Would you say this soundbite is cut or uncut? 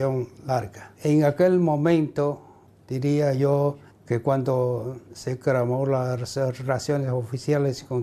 cut